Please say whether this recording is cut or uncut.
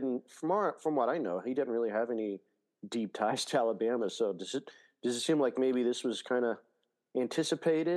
uncut